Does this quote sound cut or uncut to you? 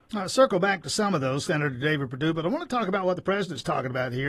uncut